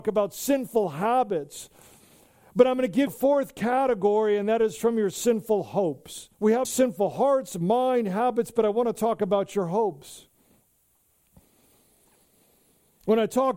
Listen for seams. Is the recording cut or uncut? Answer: cut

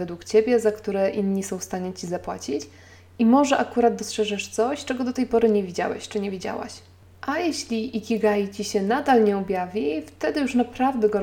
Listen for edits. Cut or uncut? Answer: uncut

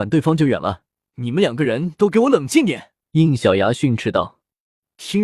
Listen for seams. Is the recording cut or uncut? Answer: cut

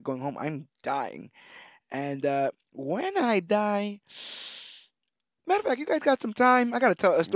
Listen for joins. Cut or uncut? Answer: uncut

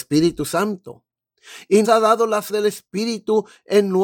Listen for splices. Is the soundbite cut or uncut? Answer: cut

